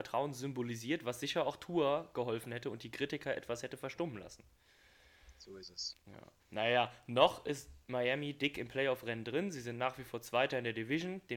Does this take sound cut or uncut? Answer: cut